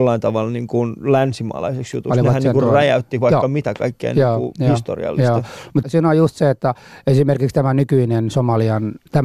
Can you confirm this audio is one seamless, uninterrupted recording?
no; 1 cut; at 5.8 s

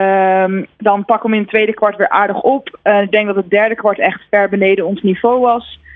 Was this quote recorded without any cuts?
yes; 0 cuts

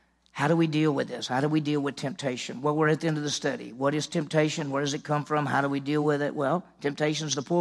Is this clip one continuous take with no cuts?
yes; 0 cuts

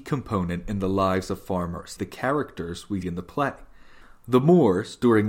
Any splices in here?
yes; 2 cuts; at 2.0 s, 3.0 s

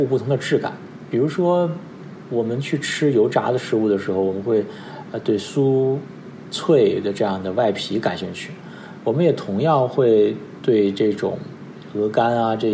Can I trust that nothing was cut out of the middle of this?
no; 1 cut; at 2.3 s

